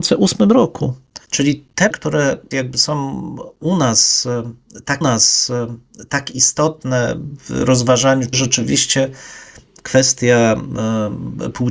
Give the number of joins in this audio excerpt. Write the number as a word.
five